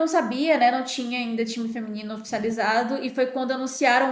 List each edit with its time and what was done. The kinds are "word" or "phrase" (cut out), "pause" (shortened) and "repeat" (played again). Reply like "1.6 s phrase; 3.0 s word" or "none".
none